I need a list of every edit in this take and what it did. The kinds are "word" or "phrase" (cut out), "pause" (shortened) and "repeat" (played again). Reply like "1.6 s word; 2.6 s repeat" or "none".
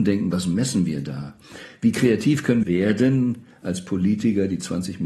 2.6 s word